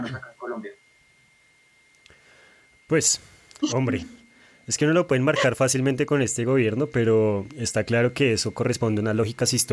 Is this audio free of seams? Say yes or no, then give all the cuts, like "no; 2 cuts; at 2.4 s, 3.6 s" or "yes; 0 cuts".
yes; 0 cuts